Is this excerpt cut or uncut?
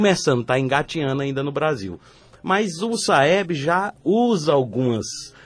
uncut